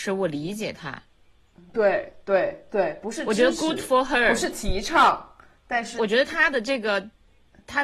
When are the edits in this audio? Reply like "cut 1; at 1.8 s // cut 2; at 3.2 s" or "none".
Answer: cut 1; at 6.0 s